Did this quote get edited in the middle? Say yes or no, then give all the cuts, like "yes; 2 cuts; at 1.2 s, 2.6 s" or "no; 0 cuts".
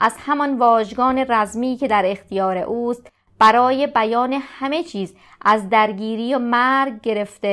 no; 0 cuts